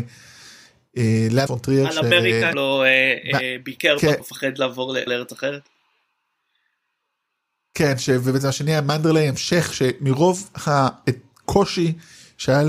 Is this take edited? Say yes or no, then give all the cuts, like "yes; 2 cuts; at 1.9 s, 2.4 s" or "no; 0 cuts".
yes; 4 cuts; at 1.5 s, 2.5 s, 4.2 s, 5.1 s